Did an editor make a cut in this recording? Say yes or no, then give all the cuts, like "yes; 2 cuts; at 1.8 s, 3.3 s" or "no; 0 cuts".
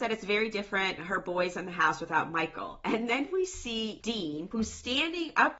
yes; 1 cut; at 1.0 s